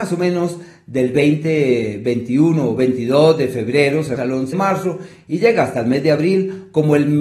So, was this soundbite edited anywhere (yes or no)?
yes